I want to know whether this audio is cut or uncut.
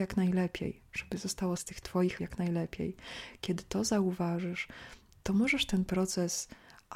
cut